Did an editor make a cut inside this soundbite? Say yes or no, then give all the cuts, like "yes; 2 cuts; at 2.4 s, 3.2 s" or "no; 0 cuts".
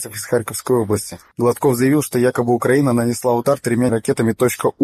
yes; 1 cut; at 3.9 s